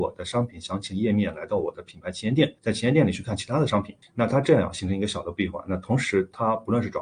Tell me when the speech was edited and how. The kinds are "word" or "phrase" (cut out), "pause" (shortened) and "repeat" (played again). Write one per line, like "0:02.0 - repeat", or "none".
0:02.6 - pause
0:04.0 - pause